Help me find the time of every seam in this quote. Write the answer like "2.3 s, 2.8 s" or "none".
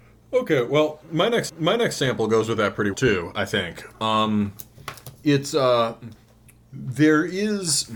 1.5 s, 2.9 s